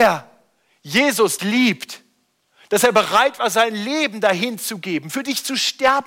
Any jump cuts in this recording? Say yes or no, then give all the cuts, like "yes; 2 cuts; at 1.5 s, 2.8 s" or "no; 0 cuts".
yes; 1 cut; at 1.4 s